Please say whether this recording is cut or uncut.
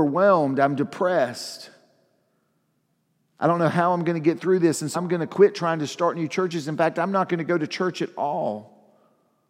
cut